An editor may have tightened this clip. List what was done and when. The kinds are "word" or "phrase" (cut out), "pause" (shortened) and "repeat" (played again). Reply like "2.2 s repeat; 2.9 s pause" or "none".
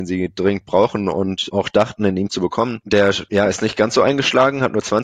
none